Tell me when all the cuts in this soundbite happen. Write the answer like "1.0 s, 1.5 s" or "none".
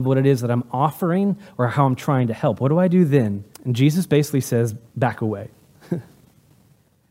3.5 s, 4.9 s